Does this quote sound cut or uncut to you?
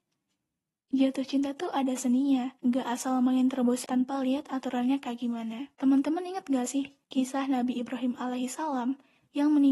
cut